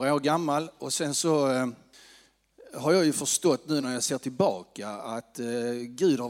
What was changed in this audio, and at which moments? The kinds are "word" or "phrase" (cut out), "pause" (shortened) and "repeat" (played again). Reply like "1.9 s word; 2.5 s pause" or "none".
none